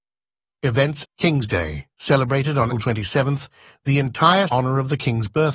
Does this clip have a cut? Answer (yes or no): yes